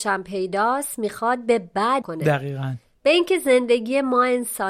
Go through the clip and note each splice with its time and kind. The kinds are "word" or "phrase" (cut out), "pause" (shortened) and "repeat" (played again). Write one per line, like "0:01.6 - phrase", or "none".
0:02.0 - phrase